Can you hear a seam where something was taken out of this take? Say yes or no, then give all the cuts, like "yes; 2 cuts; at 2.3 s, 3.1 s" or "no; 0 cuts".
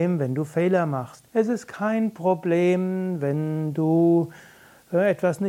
yes; 1 cut; at 1.3 s